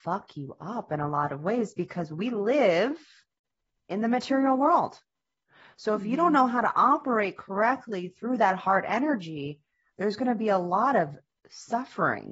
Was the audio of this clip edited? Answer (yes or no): no